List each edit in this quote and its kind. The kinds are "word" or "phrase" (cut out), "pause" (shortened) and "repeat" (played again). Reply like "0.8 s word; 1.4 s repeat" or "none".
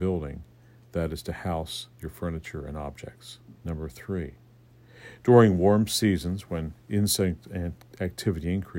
1.9 s pause; 3.6 s pause

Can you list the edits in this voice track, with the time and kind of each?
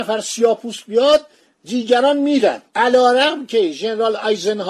none

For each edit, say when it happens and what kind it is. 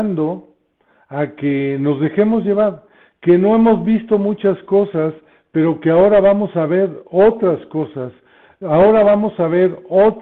none

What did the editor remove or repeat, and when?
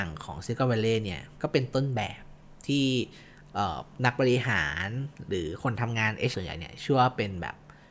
6.3 s word

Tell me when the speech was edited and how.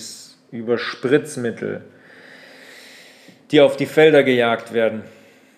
none

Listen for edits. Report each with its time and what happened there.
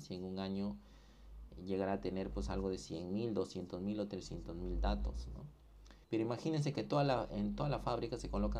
6.0 s pause

